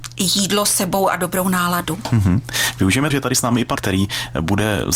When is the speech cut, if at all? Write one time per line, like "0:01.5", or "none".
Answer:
0:03.1
0:03.8

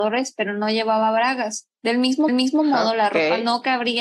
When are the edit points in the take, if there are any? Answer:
0:01.7
0:02.3

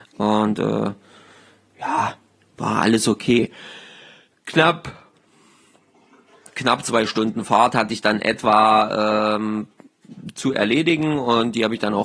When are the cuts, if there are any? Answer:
none

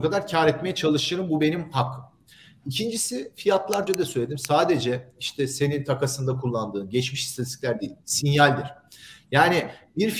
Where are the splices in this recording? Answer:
0:03.9

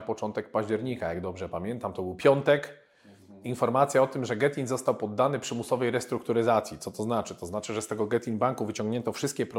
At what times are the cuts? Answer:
none

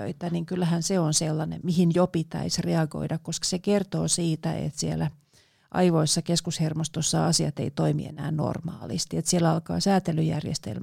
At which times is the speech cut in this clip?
0:01.6

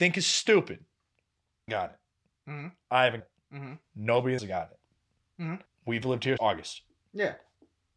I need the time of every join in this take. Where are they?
0:01.7
0:03.2
0:04.4
0:05.7
0:06.4

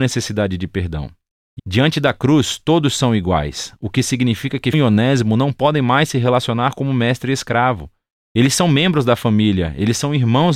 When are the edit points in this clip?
0:01.6
0:04.7

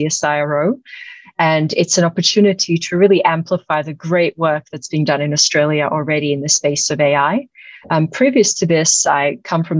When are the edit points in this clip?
none

